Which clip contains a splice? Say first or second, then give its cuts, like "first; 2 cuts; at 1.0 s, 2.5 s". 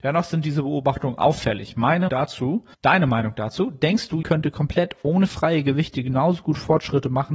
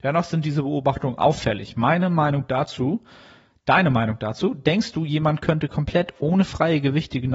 first; 3 cuts; at 2.1 s, 2.7 s, 4.2 s